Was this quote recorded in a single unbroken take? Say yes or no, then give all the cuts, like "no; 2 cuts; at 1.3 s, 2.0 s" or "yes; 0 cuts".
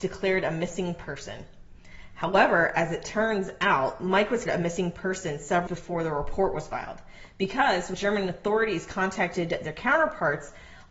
no; 3 cuts; at 4.5 s, 5.7 s, 7.9 s